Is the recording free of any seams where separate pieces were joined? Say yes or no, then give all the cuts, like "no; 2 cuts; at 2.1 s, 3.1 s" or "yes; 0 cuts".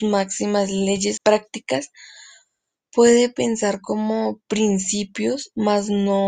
no; 1 cut; at 1.2 s